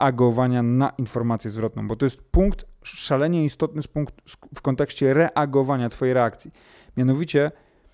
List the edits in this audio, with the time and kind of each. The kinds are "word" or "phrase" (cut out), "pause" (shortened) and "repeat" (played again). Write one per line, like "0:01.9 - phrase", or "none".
none